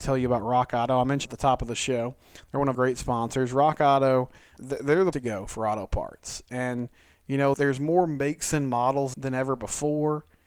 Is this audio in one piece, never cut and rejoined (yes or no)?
no